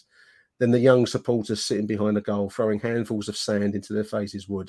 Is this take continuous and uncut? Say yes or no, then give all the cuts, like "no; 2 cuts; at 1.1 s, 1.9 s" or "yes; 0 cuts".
yes; 0 cuts